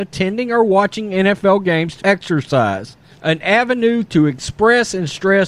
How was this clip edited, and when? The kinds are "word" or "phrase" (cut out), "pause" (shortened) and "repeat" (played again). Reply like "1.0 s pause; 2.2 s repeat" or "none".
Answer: 2.0 s phrase; 3.1 s pause